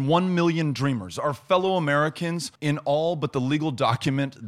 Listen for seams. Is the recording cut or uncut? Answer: cut